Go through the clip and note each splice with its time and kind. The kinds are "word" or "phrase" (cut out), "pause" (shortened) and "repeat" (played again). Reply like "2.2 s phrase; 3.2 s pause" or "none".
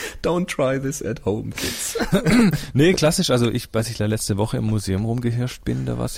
none